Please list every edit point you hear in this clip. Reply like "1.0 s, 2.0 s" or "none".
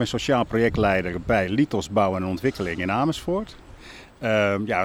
none